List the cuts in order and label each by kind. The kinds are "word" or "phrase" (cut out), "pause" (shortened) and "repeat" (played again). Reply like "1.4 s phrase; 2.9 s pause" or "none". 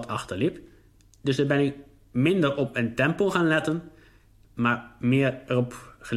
none